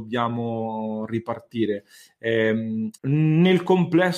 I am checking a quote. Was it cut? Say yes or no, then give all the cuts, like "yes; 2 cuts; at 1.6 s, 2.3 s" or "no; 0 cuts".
yes; 1 cut; at 3.0 s